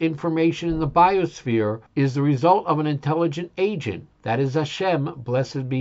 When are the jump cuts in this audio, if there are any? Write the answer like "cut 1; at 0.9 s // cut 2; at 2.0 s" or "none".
cut 1; at 1.9 s // cut 2; at 4.1 s